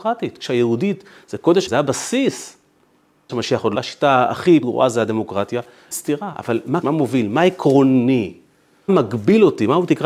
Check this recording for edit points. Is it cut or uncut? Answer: cut